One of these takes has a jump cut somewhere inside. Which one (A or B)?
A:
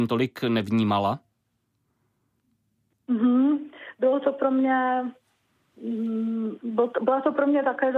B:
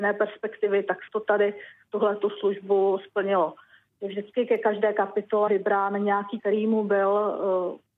B